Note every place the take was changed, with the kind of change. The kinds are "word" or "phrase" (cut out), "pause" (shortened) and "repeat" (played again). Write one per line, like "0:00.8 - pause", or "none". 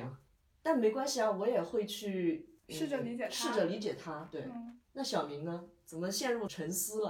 0:04.8 - pause